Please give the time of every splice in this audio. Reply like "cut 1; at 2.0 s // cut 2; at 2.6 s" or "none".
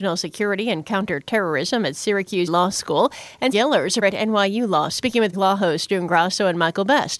cut 1; at 2.5 s // cut 2; at 3.5 s // cut 3; at 4.0 s // cut 4; at 4.9 s // cut 5; at 5.3 s